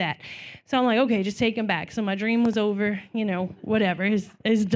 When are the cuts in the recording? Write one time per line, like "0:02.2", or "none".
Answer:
none